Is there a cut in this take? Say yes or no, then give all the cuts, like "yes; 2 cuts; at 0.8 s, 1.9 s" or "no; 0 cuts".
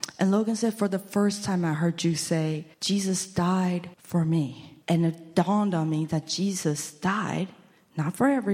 yes; 3 cuts; at 2.7 s, 3.9 s, 4.8 s